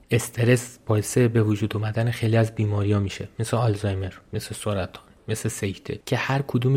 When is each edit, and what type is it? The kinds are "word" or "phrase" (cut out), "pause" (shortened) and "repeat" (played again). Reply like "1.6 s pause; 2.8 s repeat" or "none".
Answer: none